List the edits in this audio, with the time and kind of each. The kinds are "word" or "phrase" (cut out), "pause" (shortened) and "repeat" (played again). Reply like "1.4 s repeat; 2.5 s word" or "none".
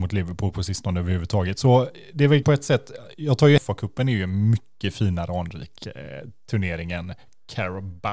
2.4 s word; 3.6 s word